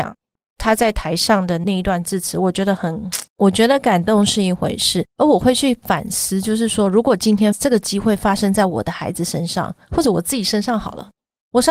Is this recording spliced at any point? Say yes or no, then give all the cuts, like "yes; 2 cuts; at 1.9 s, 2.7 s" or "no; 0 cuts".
yes; 2 cuts; at 3.3 s, 5.1 s